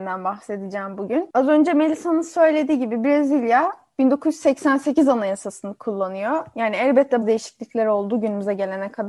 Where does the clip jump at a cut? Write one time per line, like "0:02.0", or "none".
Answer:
0:07.2